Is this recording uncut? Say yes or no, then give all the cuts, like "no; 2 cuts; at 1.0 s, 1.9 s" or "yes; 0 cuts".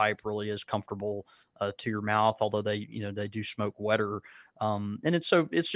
yes; 0 cuts